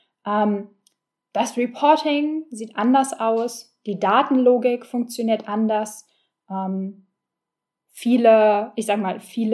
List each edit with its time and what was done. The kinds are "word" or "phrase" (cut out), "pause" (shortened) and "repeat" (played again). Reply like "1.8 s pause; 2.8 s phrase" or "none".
none